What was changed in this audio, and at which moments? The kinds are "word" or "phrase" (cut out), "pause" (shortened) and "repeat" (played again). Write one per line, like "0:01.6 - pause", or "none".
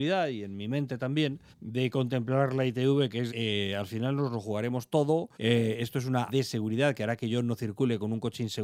0:01.5 - pause
0:03.3 - word
0:05.3 - pause
0:06.3 - word